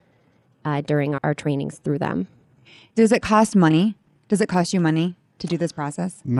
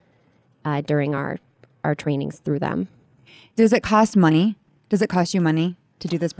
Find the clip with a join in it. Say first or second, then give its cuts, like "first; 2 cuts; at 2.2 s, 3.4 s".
first; 1 cut; at 1.2 s